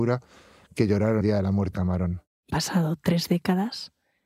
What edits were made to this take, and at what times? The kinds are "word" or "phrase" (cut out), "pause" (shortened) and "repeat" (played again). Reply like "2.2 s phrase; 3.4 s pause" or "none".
1.2 s word; 1.7 s word; 2.5 s word